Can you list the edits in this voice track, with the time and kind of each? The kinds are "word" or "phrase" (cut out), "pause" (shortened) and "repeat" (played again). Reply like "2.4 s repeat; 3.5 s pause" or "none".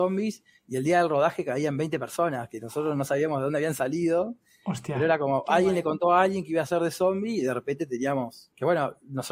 none